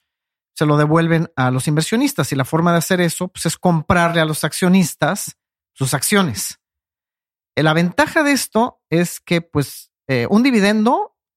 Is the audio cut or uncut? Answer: uncut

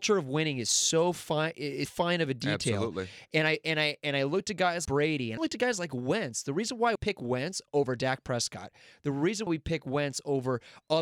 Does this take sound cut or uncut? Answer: cut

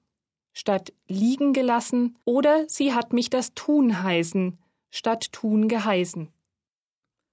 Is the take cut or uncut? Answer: cut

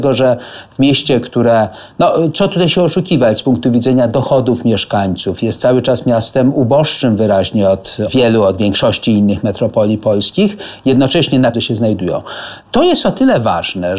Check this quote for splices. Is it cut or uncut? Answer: cut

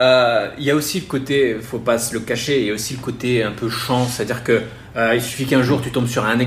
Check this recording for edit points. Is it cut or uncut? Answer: uncut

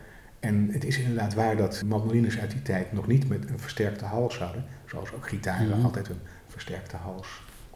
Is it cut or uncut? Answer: cut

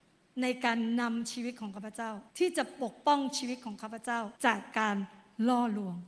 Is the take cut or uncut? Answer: cut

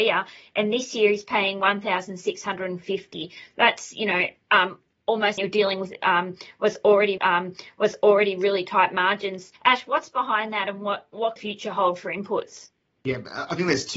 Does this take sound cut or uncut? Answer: cut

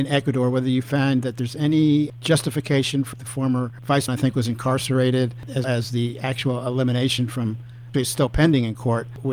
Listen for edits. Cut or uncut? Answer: cut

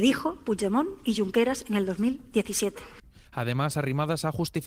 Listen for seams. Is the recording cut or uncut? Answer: uncut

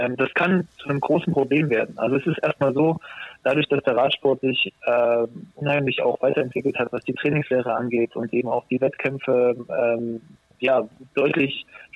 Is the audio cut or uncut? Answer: uncut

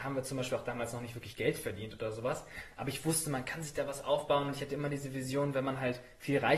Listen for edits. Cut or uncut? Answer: uncut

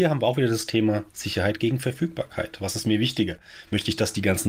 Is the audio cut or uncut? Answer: uncut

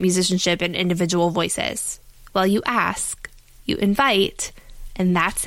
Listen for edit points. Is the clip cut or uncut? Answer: uncut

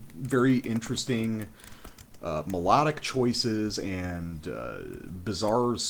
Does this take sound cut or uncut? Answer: uncut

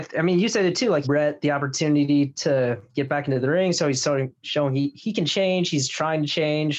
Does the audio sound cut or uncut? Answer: cut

